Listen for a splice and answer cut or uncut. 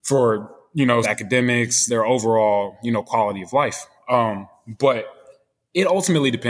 cut